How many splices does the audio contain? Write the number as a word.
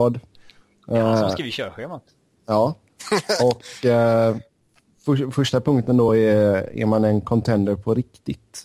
zero